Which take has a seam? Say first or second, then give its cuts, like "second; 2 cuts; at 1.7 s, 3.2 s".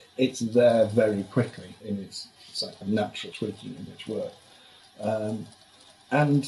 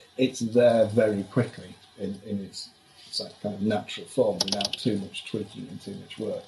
first; 5 cuts; at 1.8 s, 2.4 s, 2.8 s, 3.3 s, 3.9 s